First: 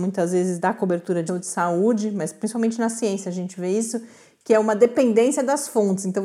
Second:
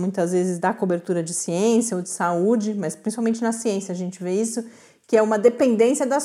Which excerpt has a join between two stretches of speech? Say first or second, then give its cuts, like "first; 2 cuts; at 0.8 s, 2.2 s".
first; 1 cut; at 1.3 s